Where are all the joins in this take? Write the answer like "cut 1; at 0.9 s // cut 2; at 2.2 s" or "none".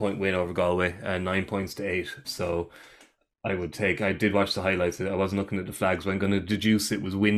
cut 1; at 2.2 s